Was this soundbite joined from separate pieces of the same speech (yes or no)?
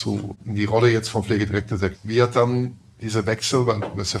yes